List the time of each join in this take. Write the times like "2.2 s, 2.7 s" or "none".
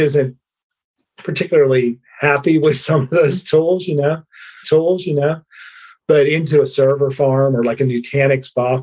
4.6 s